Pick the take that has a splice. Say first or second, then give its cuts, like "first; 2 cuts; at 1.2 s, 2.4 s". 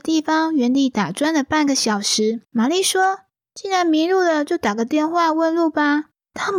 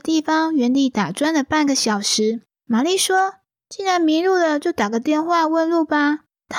first; 1 cut; at 2.4 s